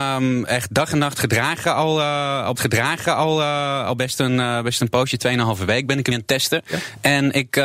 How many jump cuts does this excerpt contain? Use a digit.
2